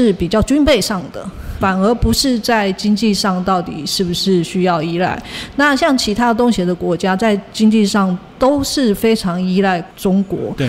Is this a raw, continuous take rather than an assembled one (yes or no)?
no